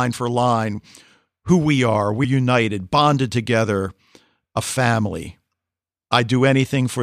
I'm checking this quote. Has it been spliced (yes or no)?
yes